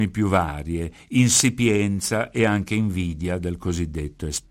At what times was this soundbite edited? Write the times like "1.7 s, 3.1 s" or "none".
none